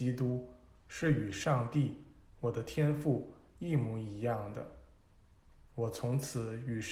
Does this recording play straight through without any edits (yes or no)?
yes